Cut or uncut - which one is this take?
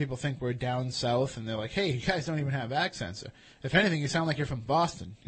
uncut